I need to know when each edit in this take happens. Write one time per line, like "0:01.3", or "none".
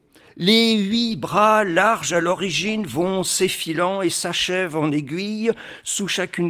none